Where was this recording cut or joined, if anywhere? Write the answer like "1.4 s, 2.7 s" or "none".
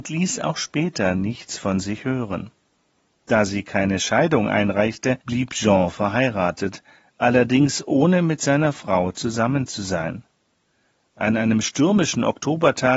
5.2 s